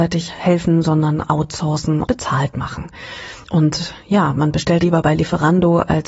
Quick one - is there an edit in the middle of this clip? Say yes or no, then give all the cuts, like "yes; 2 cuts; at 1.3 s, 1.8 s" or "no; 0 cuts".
yes; 2 cuts; at 2.0 s, 4.8 s